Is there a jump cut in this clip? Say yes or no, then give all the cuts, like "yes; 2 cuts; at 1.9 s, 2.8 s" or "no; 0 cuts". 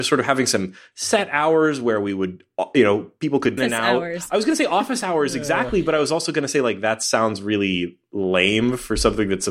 yes; 1 cut; at 3.6 s